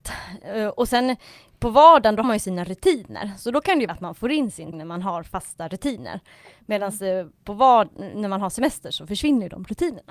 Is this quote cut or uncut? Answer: cut